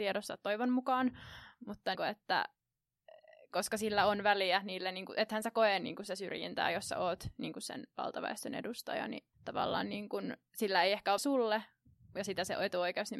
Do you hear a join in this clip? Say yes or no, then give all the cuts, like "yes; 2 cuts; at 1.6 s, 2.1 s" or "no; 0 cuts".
yes; 3 cuts; at 1.9 s, 9.3 s, 11.2 s